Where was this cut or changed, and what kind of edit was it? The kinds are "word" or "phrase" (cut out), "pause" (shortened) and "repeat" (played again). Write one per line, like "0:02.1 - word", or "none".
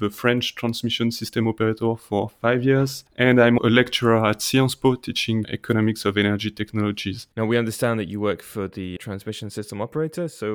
0:03.1 - pause
0:03.6 - word
0:05.4 - word
0:07.3 - pause
0:09.0 - word